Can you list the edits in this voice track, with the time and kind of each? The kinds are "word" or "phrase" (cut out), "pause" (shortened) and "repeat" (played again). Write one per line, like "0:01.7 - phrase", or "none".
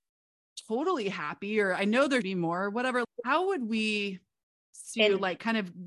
0:02.2 - word
0:03.0 - word
0:04.9 - word